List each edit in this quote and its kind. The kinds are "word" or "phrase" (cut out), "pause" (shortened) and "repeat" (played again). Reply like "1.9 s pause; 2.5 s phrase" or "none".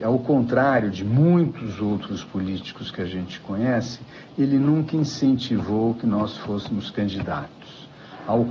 none